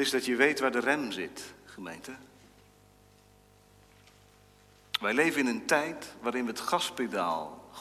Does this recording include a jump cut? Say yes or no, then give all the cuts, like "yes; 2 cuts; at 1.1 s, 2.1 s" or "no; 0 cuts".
no; 0 cuts